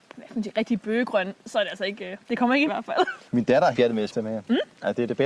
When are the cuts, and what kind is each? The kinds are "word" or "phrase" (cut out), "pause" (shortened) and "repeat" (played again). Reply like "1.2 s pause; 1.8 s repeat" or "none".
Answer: 2.2 s pause; 2.7 s phrase; 3.3 s pause; 3.7 s word; 4.1 s word